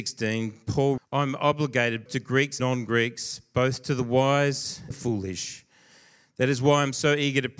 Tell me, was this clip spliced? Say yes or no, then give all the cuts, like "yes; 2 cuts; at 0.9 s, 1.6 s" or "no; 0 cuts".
yes; 4 cuts; at 1.0 s, 2.1 s, 2.6 s, 4.9 s